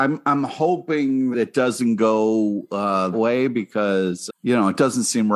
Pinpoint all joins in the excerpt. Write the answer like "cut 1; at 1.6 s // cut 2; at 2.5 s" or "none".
cut 1; at 1.3 s // cut 2; at 3.1 s // cut 3; at 4.3 s